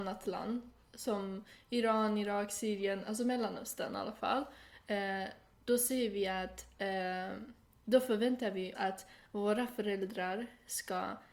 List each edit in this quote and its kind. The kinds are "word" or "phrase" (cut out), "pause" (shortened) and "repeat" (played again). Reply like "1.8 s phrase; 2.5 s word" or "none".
8.7 s word